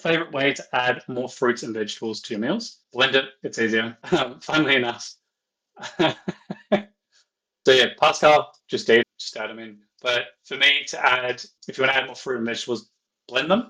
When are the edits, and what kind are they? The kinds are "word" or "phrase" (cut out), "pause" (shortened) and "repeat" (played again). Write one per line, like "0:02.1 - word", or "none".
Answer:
0:02.8 - pause
0:04.0 - pause
0:07.7 - word
0:08.6 - pause
0:09.0 - word
0:11.6 - word

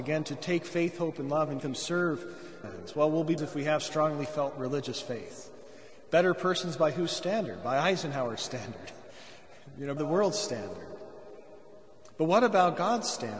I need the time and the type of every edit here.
0:01.6 - phrase
0:02.6 - word
0:03.4 - phrase
0:10.0 - word

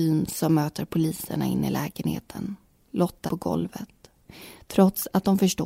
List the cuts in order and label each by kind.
0:03.3 - word

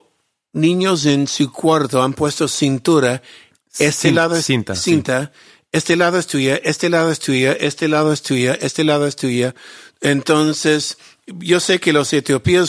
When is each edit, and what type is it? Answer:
none

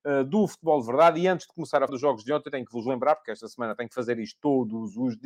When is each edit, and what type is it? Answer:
0:01.9 - word

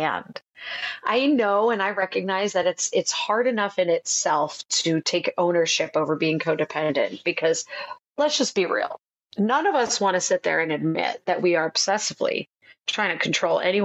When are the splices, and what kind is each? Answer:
none

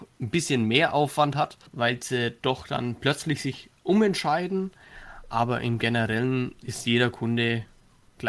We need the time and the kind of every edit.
0:01.7 - pause

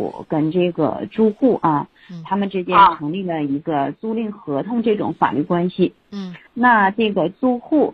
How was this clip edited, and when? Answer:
0:06.5 - pause

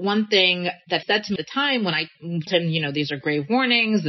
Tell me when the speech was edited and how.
0:01.0 - word
0:01.4 - word
0:02.5 - word

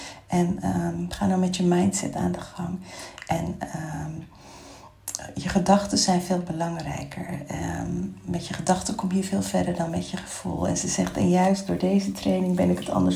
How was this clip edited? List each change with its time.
none

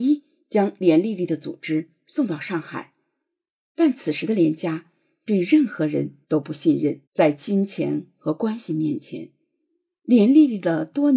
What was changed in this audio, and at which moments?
0:06.2 - pause
0:07.0 - pause

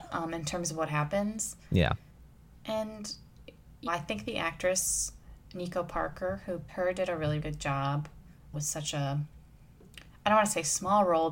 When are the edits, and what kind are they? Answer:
0:03.9 - word
0:06.7 - word
0:07.4 - word
0:08.5 - word

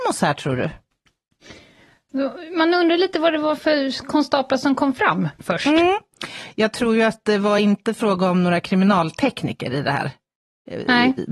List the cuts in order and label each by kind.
none

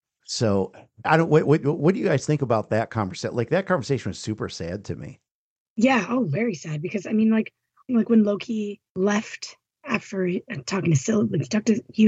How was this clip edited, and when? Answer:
0:01.0 - word
0:07.9 - phrase
0:08.9 - pause

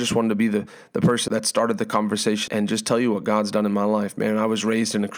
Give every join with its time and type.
0:01.3 - word
0:02.5 - word

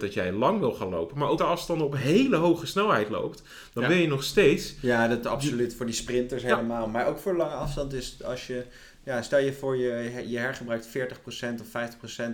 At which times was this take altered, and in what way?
0:01.4 - phrase

